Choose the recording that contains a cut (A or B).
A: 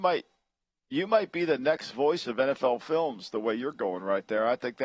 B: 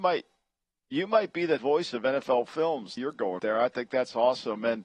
B